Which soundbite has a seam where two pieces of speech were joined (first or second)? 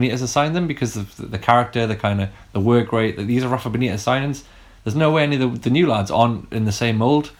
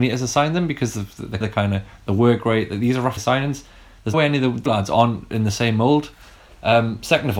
second